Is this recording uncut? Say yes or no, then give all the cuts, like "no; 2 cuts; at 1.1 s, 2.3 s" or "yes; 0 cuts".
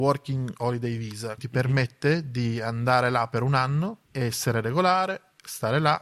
no; 2 cuts; at 1.4 s, 4.0 s